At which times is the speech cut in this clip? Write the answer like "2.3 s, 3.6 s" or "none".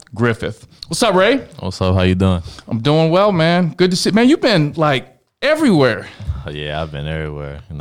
none